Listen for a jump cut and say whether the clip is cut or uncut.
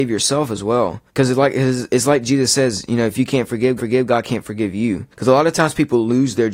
cut